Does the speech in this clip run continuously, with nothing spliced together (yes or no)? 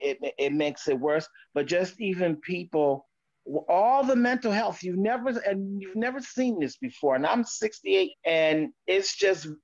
no